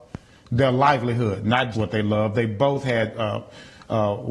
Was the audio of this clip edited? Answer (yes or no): yes